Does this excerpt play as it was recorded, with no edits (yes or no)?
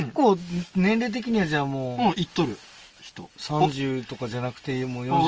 no